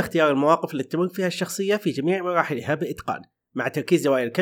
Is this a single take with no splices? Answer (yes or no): yes